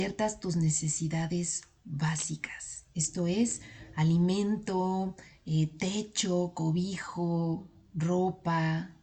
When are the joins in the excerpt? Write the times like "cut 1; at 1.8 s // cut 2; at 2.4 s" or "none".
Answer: none